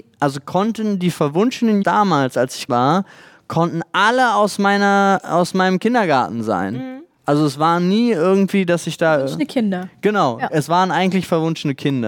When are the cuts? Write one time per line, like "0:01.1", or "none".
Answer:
0:01.8
0:02.7